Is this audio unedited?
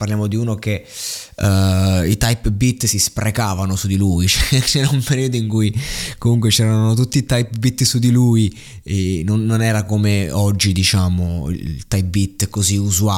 yes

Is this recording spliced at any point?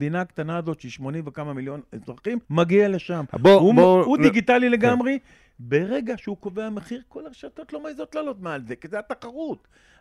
yes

